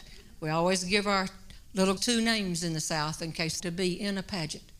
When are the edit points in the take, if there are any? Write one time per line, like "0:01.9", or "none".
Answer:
0:02.0
0:03.6